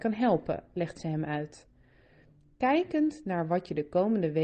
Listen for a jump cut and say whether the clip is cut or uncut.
uncut